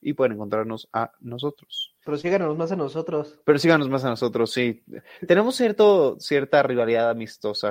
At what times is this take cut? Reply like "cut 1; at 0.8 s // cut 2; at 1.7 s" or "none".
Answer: cut 1; at 2.0 s // cut 2; at 3.4 s